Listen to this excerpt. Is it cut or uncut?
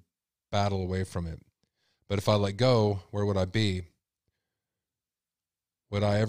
uncut